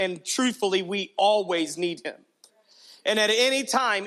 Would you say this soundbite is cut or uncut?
uncut